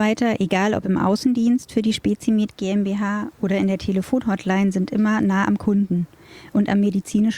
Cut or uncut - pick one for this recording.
uncut